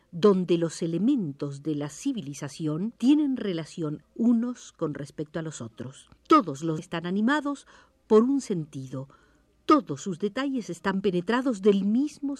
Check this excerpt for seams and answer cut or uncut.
cut